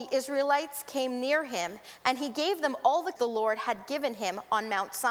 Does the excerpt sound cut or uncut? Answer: cut